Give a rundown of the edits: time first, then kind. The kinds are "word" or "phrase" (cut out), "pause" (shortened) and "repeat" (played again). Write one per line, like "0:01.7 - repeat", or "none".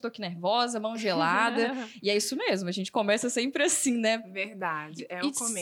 none